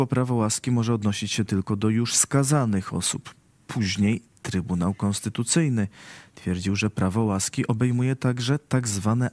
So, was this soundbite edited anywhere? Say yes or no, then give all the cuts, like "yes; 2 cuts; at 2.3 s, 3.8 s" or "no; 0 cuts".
no; 0 cuts